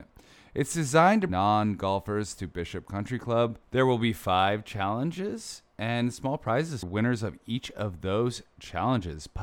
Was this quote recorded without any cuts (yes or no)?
no